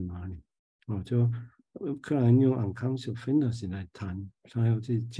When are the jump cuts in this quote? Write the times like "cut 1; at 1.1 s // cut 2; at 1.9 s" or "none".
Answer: none